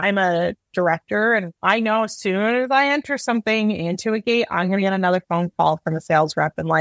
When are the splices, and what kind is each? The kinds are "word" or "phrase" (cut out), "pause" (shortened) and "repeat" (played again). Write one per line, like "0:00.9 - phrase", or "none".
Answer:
0:01.6 - pause

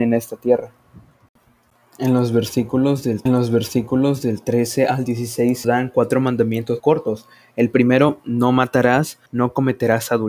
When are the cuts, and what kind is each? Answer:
0:03.3 - repeat
0:05.6 - word
0:06.8 - phrase
0:09.3 - pause

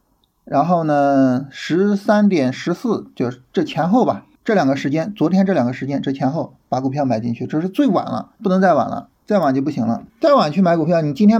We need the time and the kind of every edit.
0:04.4 - pause
0:08.4 - pause
0:09.2 - pause
0:10.1 - pause

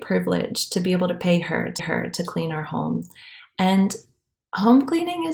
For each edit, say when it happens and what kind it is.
0:01.8 - repeat

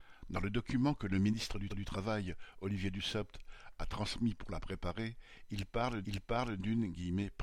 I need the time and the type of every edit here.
0:01.7 - repeat
0:06.0 - repeat

